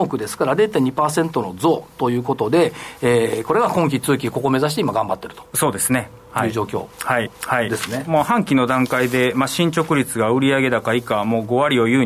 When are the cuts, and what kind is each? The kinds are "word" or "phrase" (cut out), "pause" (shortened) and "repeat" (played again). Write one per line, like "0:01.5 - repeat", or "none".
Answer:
0:07.3 - repeat

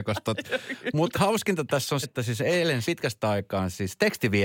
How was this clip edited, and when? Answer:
0:01.1 - word
0:02.0 - word
0:02.8 - word

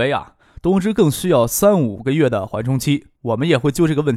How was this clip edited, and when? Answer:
0:03.2 - pause

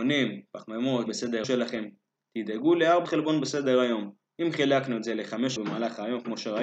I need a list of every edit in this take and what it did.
0:01.1 - word
0:01.4 - word
0:03.0 - word
0:05.6 - word

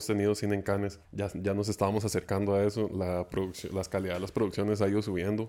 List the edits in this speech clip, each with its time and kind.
0:01.0 - pause

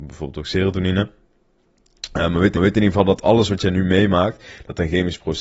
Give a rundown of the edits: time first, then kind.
0:02.5 - repeat

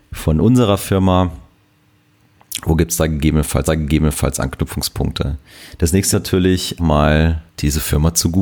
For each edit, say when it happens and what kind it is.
0:03.6 - repeat
0:06.1 - word
0:06.8 - word
0:07.5 - pause

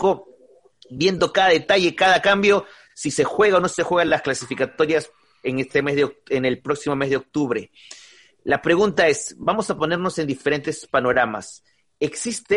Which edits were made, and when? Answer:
none

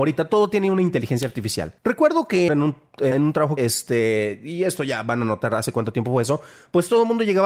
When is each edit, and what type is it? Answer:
0:01.8 - pause
0:02.5 - phrase
0:03.1 - word
0:03.6 - phrase

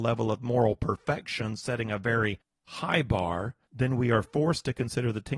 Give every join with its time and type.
0:03.6 - pause

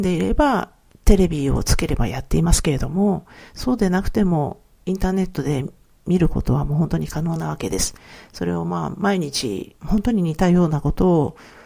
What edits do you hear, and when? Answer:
0:09.8 - pause

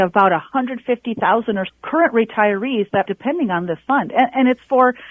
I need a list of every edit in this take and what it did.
0:01.7 - word
0:03.1 - word

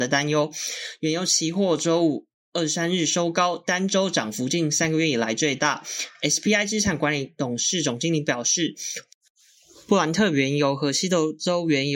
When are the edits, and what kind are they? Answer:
none

